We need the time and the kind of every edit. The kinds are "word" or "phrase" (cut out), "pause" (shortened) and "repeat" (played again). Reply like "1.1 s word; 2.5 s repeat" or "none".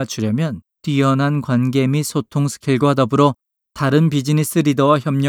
none

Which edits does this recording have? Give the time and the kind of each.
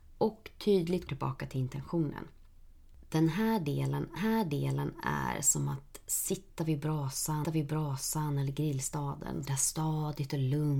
1.1 s word; 4.2 s repeat; 7.4 s repeat; 9.5 s phrase

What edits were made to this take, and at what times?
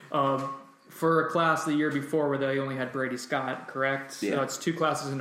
none

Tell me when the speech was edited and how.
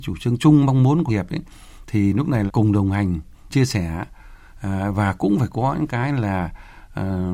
1.1 s word; 2.5 s word; 3.5 s word

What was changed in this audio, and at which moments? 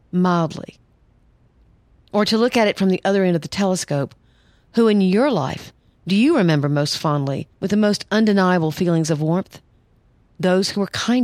7.5 s pause

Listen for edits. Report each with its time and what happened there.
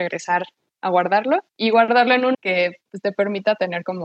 1.5 s pause; 2.3 s word

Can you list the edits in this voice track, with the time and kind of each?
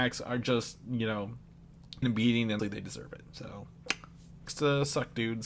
2.0 s word; 2.6 s word; 4.5 s word

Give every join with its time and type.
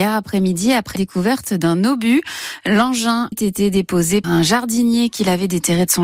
1.0 s word; 3.3 s word; 4.2 s word

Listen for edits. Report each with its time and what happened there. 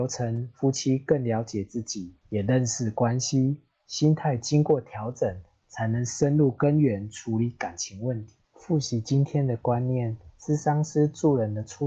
2.2 s pause; 8.4 s pause; 10.3 s pause

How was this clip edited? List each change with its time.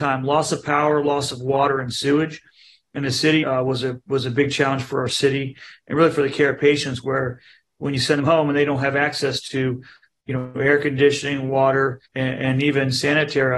3.4 s word; 12.0 s pause

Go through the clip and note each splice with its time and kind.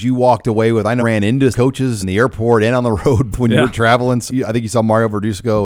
1.0 s word; 1.5 s word; 2.0 s word; 3.3 s word; 4.3 s word

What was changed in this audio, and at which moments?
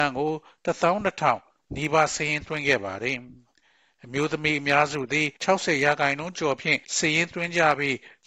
5.4 s pause; 6.8 s pause

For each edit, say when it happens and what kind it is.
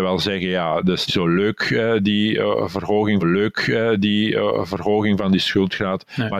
1.1 s word; 3.2 s repeat

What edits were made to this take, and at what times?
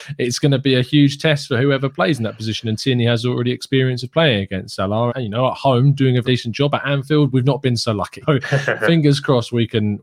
5.1 s word; 6.2 s word; 8.2 s word

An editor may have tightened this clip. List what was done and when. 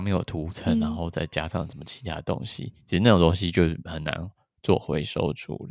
none

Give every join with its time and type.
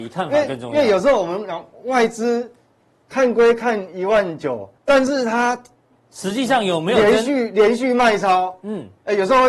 4.8 s word

